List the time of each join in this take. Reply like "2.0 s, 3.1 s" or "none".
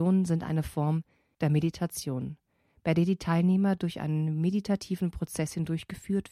none